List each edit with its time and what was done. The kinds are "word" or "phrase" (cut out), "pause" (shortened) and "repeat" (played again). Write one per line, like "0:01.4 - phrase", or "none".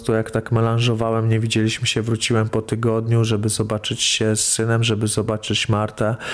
none

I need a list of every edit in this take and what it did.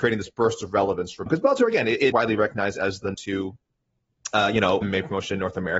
0:01.3 - word
0:02.1 - word
0:03.1 - word
0:04.8 - word

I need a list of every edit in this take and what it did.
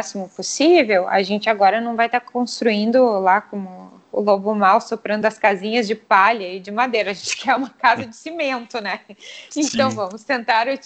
none

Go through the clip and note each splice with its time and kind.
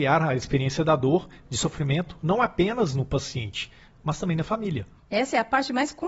none

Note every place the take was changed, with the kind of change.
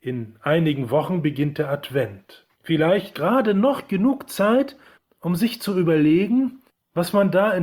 0:02.5 - pause
0:04.9 - pause

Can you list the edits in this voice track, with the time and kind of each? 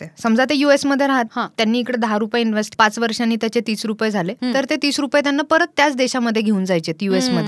0:01.3 - word
0:02.7 - word

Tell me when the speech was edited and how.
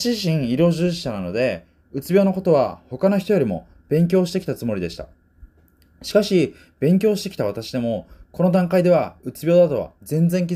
none

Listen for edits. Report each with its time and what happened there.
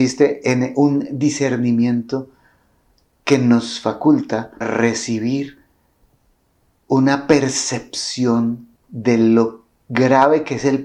0:04.6 - word
0:08.8 - pause

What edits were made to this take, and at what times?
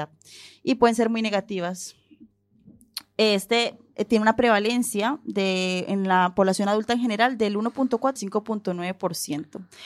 0:08.2 - word

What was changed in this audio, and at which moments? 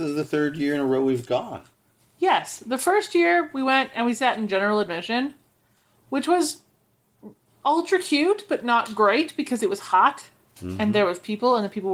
none

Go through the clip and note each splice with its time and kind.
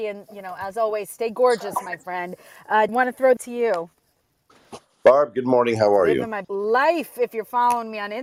0:02.9 - word
0:03.4 - word
0:06.4 - word

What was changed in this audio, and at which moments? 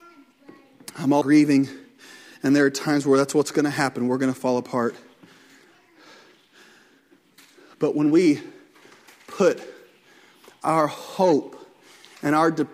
0:01.2 - word

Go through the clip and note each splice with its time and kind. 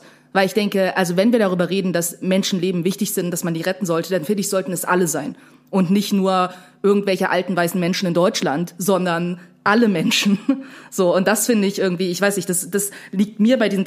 none

